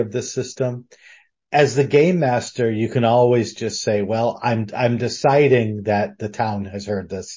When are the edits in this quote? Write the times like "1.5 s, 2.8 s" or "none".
none